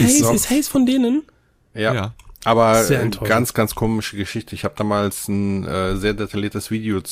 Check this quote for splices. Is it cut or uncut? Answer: uncut